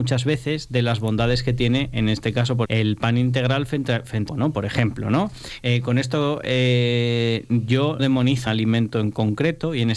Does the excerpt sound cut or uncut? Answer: cut